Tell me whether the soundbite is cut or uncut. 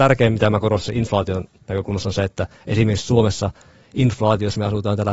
uncut